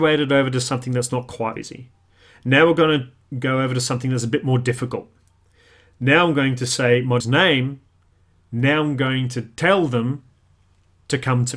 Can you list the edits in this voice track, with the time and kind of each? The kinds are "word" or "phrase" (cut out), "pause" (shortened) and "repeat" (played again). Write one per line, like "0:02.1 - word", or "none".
0:01.6 - word
0:07.2 - word